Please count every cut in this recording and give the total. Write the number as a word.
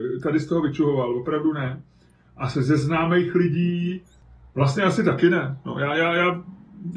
zero